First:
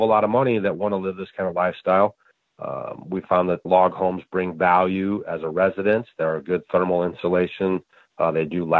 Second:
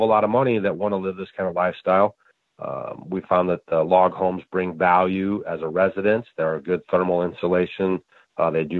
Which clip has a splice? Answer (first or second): first